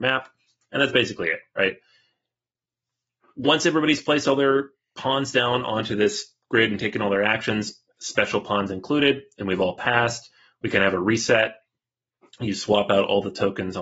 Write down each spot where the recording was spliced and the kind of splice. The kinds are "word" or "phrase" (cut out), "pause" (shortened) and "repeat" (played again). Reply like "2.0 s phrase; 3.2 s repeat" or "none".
none